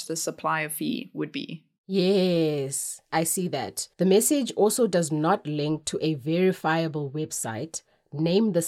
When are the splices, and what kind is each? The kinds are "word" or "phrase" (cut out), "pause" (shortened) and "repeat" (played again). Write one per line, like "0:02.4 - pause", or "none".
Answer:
0:03.9 - pause